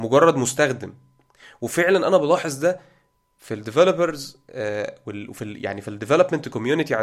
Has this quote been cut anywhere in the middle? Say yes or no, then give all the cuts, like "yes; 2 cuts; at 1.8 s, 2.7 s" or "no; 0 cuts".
no; 0 cuts